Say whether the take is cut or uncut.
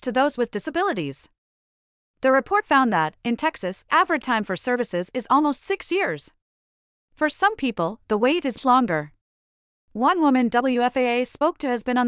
cut